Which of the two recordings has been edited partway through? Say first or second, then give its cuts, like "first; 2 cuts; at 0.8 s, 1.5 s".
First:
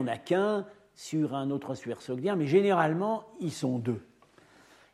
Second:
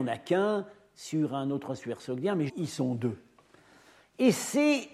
second; 1 cut; at 2.5 s